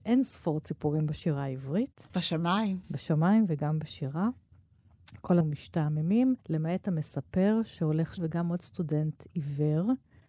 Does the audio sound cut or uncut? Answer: cut